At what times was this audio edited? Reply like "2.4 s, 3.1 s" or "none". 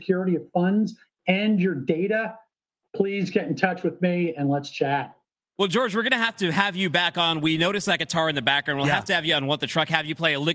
none